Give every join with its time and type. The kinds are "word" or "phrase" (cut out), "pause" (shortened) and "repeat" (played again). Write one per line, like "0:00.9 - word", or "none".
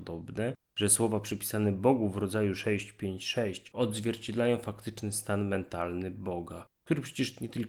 0:06.7 - pause